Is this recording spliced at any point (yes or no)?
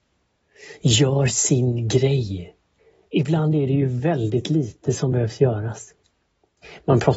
no